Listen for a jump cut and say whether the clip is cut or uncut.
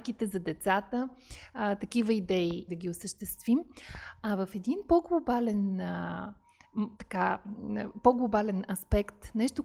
cut